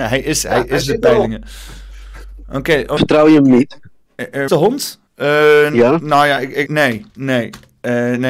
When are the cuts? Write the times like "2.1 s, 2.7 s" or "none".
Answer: 3.0 s, 4.5 s, 5.1 s, 6.7 s, 7.1 s